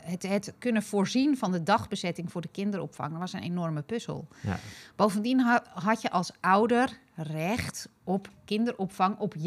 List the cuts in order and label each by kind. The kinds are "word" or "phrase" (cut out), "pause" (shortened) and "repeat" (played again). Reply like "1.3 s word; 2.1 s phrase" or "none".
none